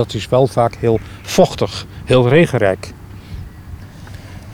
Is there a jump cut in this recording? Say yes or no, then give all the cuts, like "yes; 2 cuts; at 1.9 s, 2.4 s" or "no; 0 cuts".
no; 0 cuts